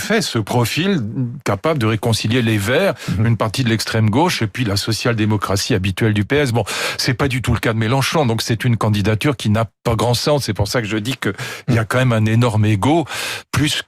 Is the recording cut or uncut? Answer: uncut